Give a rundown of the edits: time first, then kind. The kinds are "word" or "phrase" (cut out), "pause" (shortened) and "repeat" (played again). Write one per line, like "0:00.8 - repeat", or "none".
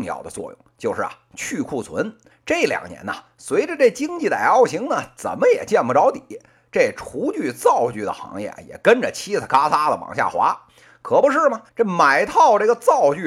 0:02.3 - pause
0:11.7 - pause